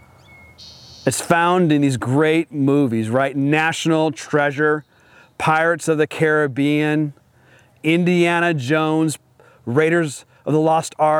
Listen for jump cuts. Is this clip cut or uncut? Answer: uncut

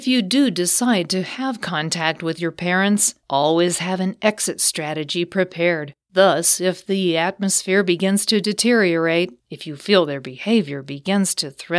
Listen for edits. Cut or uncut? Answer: cut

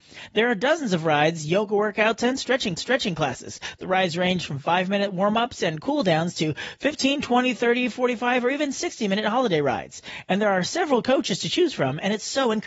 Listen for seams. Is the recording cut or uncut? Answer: cut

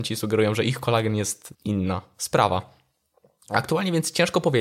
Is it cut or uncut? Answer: cut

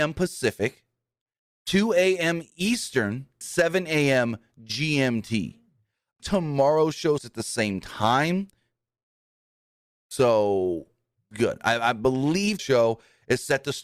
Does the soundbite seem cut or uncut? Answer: cut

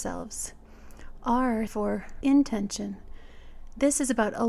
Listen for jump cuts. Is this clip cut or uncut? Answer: cut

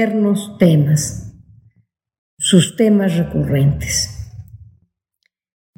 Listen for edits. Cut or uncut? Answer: uncut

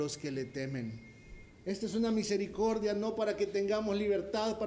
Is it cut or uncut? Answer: cut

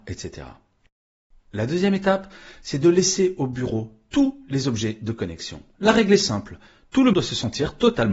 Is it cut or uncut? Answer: cut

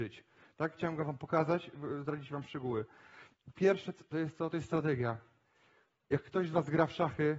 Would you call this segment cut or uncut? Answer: uncut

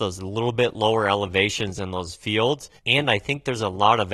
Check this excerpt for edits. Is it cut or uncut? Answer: cut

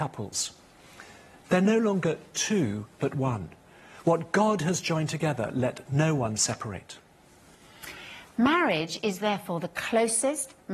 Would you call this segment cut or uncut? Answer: uncut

